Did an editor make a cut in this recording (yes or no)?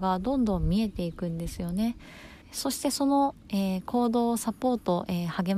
yes